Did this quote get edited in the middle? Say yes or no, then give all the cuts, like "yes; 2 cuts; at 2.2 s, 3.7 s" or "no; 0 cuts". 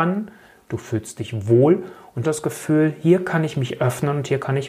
yes; 1 cut; at 2.2 s